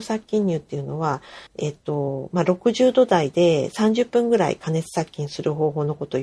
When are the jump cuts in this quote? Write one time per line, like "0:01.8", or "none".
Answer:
0:01.5